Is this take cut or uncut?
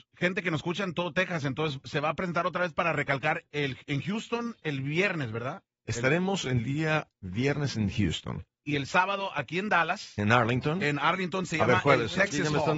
uncut